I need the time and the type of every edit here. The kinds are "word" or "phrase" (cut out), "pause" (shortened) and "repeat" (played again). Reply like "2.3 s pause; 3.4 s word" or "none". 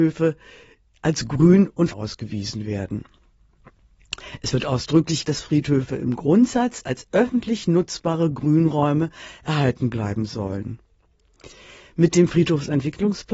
1.9 s word; 5.2 s word